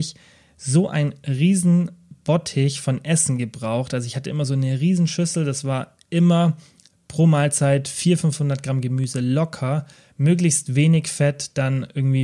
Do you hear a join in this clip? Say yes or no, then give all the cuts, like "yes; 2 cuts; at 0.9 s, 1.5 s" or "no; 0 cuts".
yes; 1 cut; at 9.9 s